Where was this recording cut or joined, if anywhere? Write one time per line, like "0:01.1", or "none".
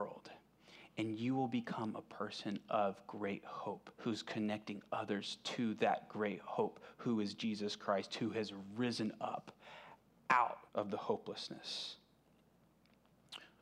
0:03.9
0:10.7